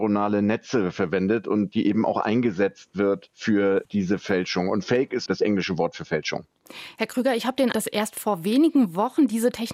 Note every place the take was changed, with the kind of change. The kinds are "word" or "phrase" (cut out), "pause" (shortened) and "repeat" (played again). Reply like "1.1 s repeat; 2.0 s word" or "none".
5.3 s word; 7.7 s word